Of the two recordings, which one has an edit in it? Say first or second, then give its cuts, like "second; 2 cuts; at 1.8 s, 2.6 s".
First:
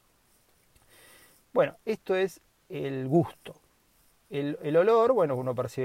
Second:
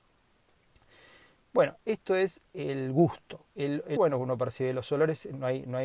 second; 3 cuts; at 2.5 s, 3.5 s, 4.0 s